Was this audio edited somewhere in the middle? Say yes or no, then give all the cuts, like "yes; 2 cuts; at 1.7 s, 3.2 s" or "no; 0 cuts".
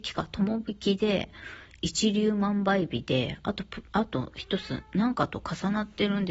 yes; 1 cut; at 3.9 s